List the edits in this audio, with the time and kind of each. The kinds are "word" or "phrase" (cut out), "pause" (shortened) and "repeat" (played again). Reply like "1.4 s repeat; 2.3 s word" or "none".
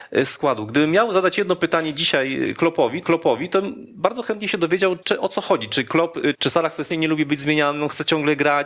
3.0 s repeat; 5.0 s word; 6.3 s word; 6.9 s phrase